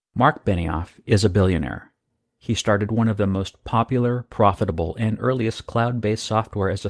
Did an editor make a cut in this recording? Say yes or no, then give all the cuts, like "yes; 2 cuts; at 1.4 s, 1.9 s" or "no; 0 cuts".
no; 0 cuts